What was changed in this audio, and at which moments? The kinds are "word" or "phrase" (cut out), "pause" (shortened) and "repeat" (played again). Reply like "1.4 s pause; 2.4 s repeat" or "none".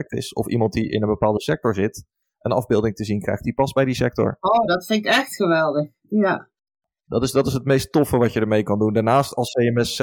none